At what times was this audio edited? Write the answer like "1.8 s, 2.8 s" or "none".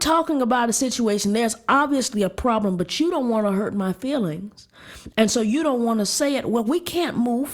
none